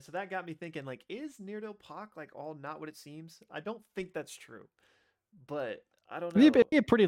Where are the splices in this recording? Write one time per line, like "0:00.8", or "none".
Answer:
none